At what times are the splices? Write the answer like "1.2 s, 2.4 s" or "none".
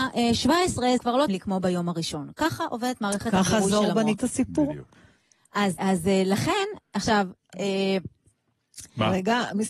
1.0 s, 1.3 s, 4.1 s, 5.8 s, 7.4 s